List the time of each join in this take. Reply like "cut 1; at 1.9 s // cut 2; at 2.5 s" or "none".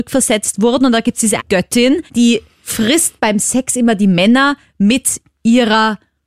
cut 1; at 1.4 s // cut 2; at 2.1 s